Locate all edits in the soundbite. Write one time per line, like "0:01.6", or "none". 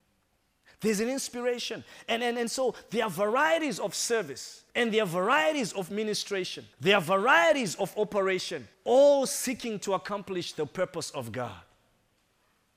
0:04.7
0:06.7
0:08.7